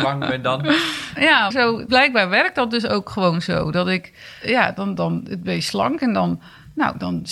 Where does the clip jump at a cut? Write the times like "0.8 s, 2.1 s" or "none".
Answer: 1.5 s, 1.9 s, 5.0 s